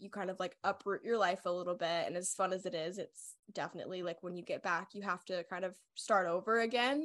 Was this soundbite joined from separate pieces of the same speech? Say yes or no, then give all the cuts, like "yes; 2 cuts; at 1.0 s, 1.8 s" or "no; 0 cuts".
no; 0 cuts